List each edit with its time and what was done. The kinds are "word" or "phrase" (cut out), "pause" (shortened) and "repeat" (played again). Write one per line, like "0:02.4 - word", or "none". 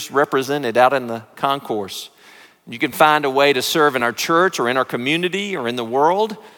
none